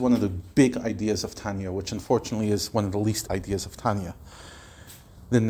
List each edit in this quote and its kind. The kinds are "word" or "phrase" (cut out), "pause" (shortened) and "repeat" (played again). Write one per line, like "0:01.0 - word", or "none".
0:03.3 - word